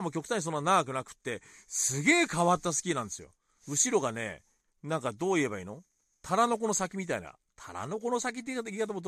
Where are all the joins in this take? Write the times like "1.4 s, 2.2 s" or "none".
none